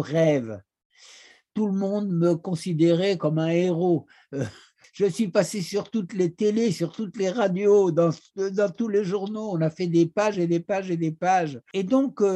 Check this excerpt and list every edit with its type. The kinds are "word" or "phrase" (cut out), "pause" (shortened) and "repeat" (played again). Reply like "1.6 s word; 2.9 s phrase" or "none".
none